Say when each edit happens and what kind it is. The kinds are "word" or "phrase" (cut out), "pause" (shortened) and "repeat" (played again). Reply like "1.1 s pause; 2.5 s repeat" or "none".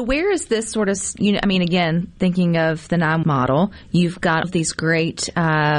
1.2 s word; 3.2 s phrase; 4.4 s word